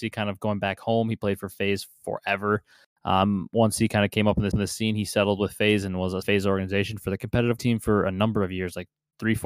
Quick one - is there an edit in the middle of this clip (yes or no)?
yes